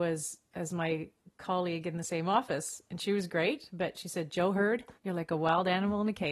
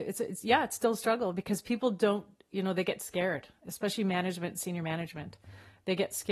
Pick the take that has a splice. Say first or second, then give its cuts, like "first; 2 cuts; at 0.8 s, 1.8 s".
first; 1 cut; at 5.0 s